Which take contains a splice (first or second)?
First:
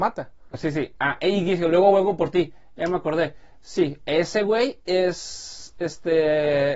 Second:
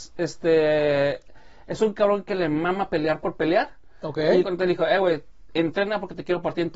second